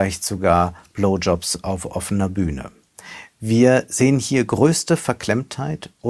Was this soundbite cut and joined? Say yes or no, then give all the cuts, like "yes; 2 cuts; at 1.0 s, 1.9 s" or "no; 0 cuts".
no; 0 cuts